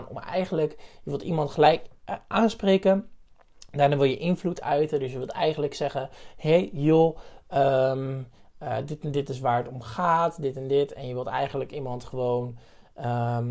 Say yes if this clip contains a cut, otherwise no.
no